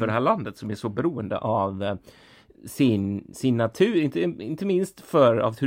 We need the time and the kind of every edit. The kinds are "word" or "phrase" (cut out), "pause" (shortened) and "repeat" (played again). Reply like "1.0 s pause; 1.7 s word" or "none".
none